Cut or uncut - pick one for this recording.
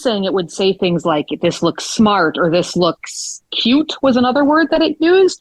cut